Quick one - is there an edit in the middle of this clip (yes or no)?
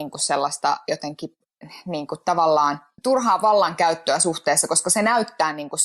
no